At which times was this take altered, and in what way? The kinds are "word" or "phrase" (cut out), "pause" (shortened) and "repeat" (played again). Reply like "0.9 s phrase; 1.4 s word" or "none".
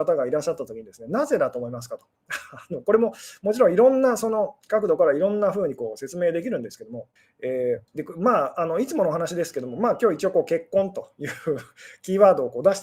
7.2 s pause; 7.9 s pause